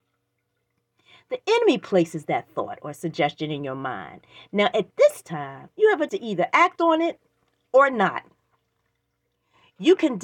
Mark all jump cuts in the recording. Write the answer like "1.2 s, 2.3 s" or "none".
5.7 s, 6.1 s